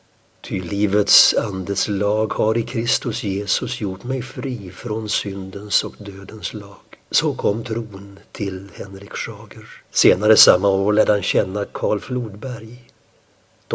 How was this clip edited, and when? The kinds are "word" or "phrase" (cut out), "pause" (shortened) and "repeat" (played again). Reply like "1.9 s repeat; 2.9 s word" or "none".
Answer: 7.0 s pause; 9.9 s pause

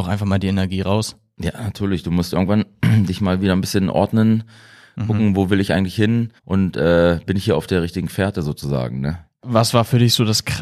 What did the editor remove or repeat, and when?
6.4 s pause

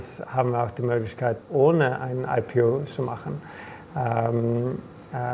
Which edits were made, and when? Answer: 1.4 s word; 2.0 s word

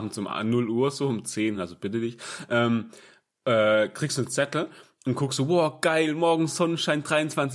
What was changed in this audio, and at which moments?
none

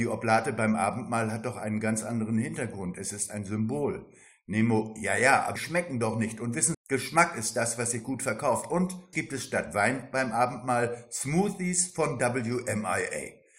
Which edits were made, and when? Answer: 5.6 s word; 6.7 s word; 9.1 s word

